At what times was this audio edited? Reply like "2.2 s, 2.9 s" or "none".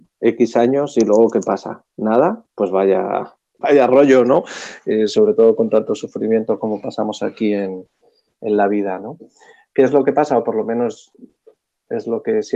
3.6 s